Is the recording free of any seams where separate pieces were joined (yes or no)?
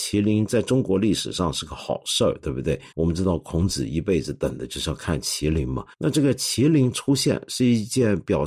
no